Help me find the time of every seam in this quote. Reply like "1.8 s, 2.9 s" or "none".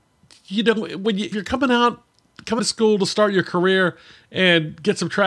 1.3 s, 2.6 s

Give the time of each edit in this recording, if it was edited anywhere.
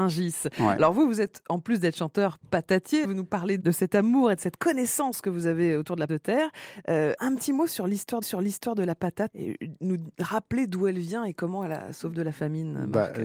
3.0 s, 3.6 s, 6.1 s, 7.2 s, 8.2 s, 9.3 s, 12.1 s

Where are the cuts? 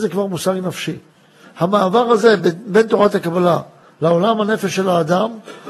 none

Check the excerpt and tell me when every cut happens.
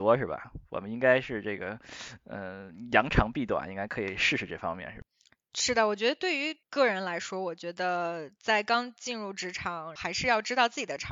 none

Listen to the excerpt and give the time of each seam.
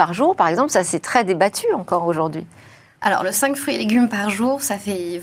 none

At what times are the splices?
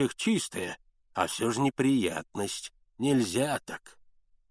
2.8 s

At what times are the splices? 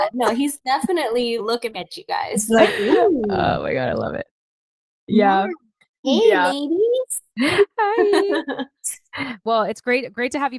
1.4 s, 1.7 s, 6.0 s

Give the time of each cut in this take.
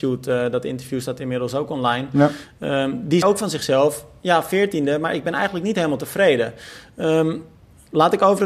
3.2 s

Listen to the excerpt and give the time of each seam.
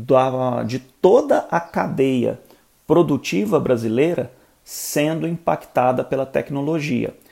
none

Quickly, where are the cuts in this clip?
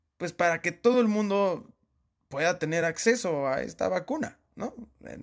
none

